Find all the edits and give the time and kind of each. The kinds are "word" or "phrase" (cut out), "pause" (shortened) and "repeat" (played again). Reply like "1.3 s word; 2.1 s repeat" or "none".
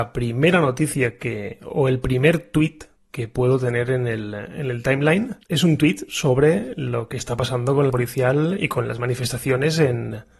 3.0 s pause; 5.4 s pause; 7.9 s phrase